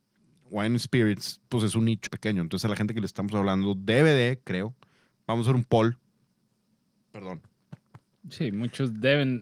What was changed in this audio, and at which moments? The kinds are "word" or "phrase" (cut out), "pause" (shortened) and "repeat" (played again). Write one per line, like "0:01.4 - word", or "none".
0:02.1 - word